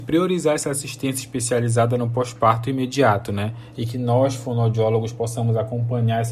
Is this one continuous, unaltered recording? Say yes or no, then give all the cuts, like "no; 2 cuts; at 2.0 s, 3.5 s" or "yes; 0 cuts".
yes; 0 cuts